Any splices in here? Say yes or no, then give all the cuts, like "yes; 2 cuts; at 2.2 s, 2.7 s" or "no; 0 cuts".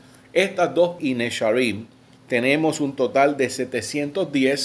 yes; 1 cut; at 1.0 s